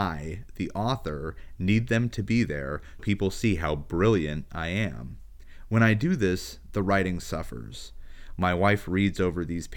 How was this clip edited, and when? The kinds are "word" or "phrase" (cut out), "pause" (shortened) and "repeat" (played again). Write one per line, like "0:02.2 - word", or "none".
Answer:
0:03.0 - word